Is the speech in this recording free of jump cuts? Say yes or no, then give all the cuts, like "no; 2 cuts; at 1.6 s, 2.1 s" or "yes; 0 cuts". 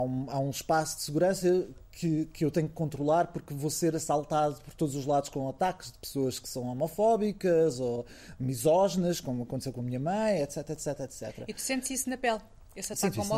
yes; 0 cuts